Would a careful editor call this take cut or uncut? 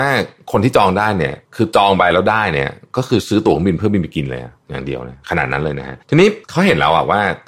cut